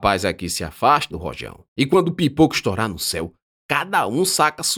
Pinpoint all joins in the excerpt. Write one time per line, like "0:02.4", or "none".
0:01.1
0:01.7